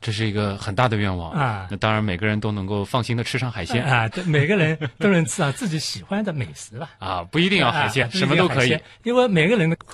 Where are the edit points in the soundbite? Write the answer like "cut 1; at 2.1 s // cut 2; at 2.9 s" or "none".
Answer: cut 1; at 8.0 s